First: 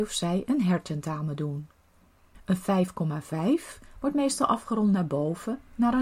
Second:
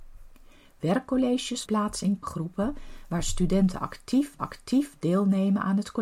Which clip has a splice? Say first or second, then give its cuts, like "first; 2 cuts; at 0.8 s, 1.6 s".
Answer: second; 3 cuts; at 1.7 s, 2.2 s, 4.4 s